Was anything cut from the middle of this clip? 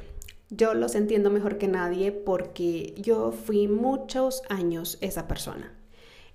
no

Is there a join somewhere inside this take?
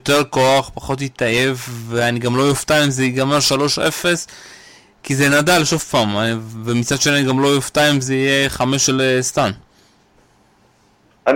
no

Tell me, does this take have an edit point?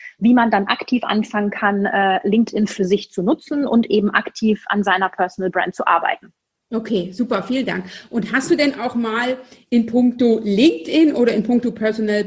no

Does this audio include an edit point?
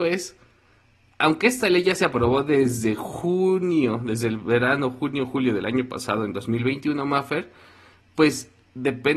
no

